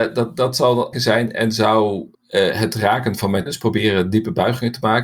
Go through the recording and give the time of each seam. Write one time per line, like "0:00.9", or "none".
0:00.9
0:02.1
0:03.5